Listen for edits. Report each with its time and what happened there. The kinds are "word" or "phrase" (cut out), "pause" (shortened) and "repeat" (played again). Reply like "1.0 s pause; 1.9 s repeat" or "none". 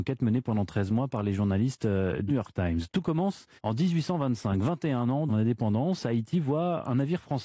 2.3 s word; 3.6 s pause; 5.3 s phrase